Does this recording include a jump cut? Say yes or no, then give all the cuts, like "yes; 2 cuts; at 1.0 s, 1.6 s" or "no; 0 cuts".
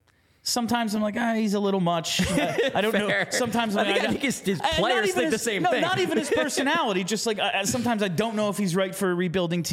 no; 0 cuts